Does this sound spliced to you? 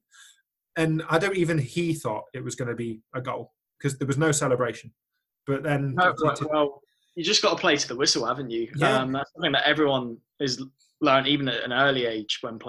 no; 0 cuts

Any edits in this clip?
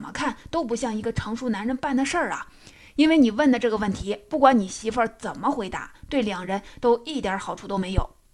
no; 0 cuts

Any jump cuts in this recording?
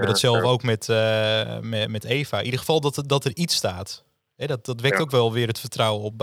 no; 0 cuts

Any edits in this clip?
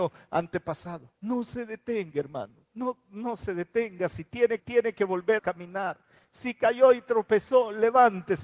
yes; 4 cuts; at 1.1 s, 2.6 s, 4.6 s, 5.4 s

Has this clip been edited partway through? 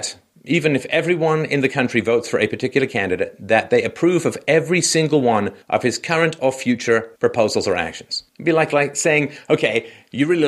yes; 3 cuts; at 5.6 s, 7.2 s, 8.3 s

